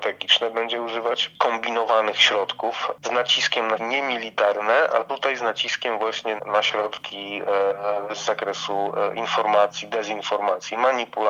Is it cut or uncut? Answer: cut